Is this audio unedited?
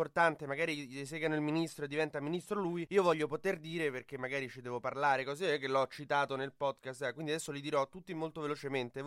yes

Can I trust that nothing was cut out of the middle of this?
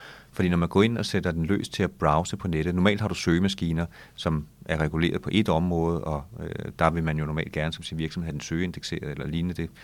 yes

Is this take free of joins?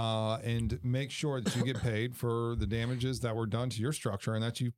yes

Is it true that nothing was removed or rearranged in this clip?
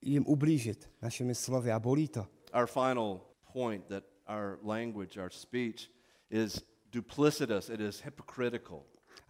no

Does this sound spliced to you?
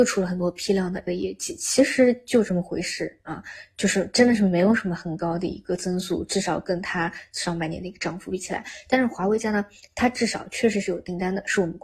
yes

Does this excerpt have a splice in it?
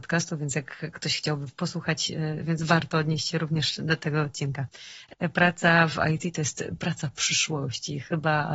no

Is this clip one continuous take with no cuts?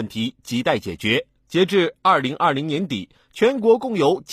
no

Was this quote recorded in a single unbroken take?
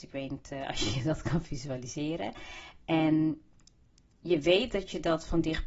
yes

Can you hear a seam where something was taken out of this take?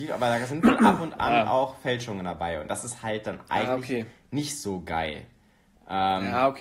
no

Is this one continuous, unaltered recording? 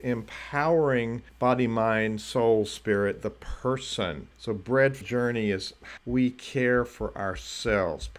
no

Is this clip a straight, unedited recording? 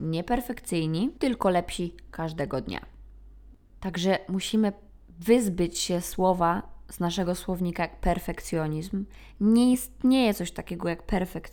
yes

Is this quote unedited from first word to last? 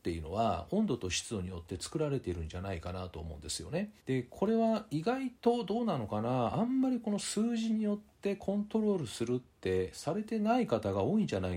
no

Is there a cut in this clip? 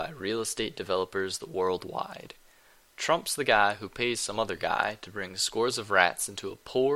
no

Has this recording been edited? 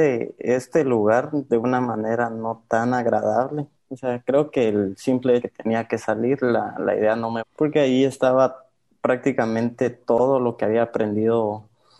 yes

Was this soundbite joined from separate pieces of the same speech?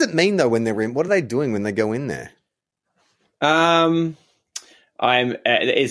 no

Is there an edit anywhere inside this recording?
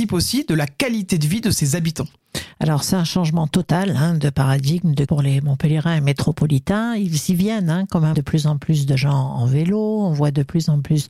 yes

